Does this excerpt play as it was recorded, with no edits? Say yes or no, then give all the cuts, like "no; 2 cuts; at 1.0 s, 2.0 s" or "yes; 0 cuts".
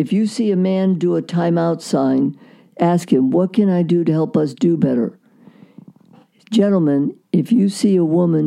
yes; 0 cuts